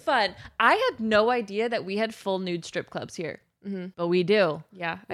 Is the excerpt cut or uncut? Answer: cut